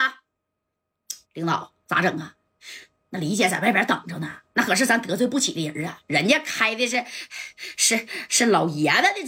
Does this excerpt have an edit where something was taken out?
yes; 1 cut; at 1.2 s

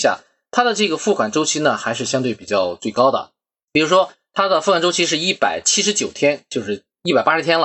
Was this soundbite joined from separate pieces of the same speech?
no; 0 cuts

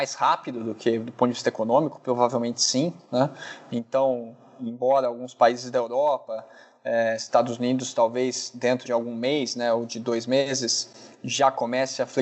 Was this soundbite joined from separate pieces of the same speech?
yes; 1 cut; at 8.8 s

